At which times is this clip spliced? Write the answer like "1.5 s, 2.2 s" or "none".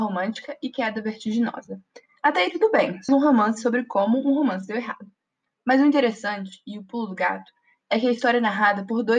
3.1 s